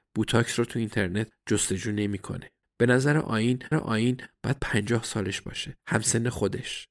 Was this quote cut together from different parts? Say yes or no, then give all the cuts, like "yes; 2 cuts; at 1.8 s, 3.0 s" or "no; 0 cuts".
yes; 3 cuts; at 2.6 s, 3.7 s, 5.8 s